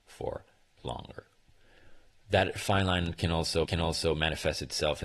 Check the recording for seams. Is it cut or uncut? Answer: cut